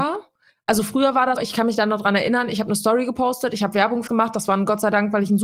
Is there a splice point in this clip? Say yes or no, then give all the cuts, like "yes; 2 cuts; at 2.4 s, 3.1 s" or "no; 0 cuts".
yes; 2 cuts; at 1.4 s, 4.1 s